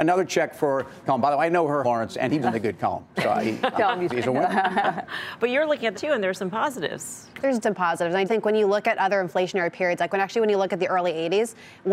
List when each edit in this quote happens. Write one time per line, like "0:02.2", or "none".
0:01.1
0:01.8
0:02.4
0:03.8
0:04.1
0:05.9
0:07.6
0:08.3

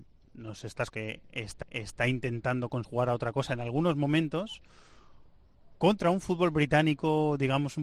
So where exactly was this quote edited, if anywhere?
0:00.9
0:01.6
0:02.8

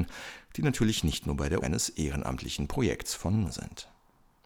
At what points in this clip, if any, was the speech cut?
0:01.6
0:03.4

